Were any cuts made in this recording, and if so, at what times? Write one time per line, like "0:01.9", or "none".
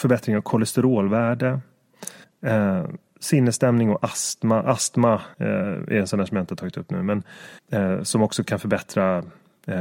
0:02.2
0:05.3
0:07.6